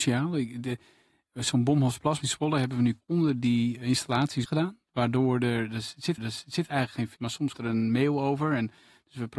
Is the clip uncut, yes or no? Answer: no